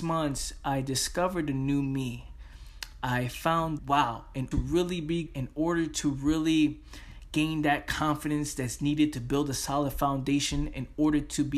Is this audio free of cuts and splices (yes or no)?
no